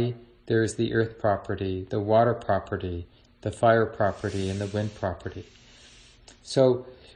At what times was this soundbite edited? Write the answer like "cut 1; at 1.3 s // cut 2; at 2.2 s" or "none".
none